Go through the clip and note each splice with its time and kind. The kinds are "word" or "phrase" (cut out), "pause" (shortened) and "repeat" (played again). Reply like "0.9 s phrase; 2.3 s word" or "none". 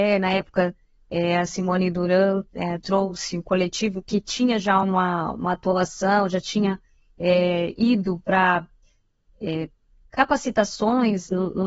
none

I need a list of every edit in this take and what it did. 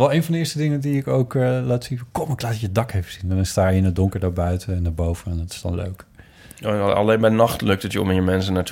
none

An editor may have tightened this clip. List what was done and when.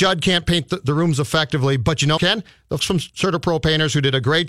2.2 s word; 2.8 s word

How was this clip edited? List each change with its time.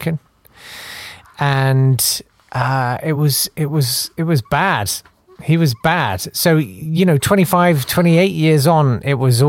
none

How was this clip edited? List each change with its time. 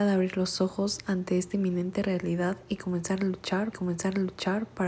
3.7 s repeat

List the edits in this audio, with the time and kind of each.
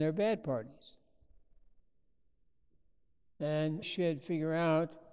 3.8 s word

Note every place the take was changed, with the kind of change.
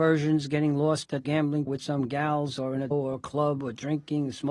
1.2 s word; 1.7 s phrase; 2.9 s word

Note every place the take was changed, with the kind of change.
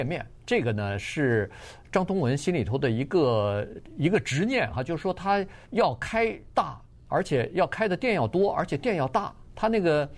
5.6 s pause

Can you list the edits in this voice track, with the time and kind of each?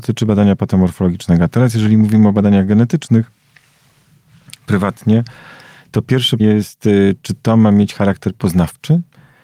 6.4 s word

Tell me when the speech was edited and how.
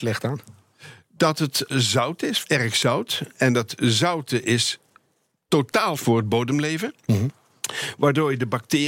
1.7 s word; 2.4 s word; 6.0 s word

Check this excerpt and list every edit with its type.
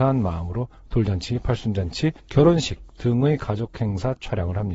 2.2 s pause

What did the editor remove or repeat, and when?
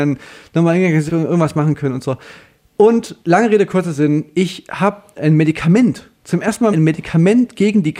1.1 s word; 3.2 s pause; 5.1 s word; 6.7 s phrase

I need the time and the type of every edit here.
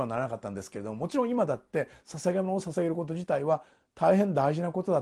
none

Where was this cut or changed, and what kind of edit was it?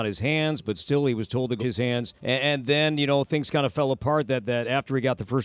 1.6 s word; 2.2 s pause

